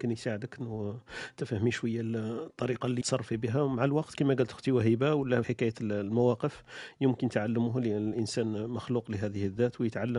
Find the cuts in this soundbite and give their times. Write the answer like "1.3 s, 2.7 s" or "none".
3.0 s, 5.4 s